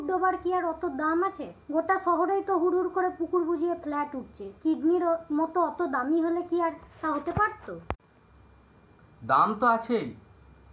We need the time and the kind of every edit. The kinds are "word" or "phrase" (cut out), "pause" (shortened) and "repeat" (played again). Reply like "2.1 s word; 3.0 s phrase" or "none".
1.6 s pause; 4.6 s pause